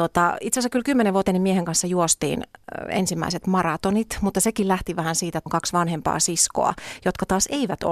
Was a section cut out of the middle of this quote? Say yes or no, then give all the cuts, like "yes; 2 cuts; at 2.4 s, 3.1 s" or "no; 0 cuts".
yes; 2 cuts; at 1.3 s, 5.5 s